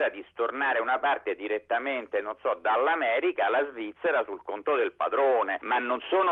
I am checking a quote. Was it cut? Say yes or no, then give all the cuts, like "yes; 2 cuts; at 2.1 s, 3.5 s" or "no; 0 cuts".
no; 0 cuts